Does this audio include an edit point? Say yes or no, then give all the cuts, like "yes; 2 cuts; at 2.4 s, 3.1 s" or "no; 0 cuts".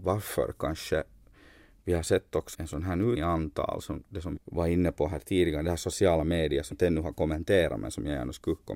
yes; 4 cuts; at 2.5 s, 3.2 s, 4.4 s, 6.7 s